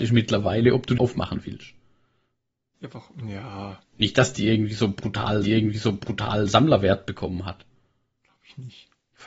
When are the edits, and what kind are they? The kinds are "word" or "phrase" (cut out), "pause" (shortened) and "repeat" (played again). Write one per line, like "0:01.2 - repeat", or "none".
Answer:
0:01.0 - word
0:05.4 - repeat